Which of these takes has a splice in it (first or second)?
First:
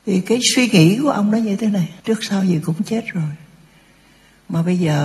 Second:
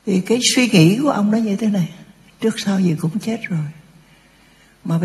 first